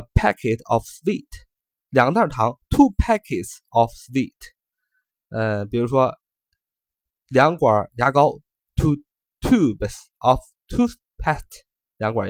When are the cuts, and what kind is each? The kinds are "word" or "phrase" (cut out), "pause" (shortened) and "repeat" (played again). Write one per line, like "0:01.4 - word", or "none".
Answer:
none